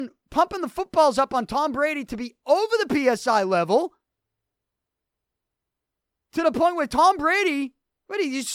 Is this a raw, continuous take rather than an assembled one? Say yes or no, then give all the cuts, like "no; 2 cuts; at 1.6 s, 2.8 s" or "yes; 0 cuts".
yes; 0 cuts